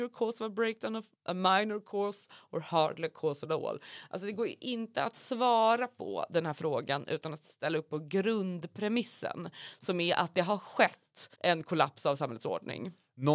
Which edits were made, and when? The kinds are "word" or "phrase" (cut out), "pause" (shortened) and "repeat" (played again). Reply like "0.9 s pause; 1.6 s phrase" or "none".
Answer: 1.1 s pause; 11.3 s pause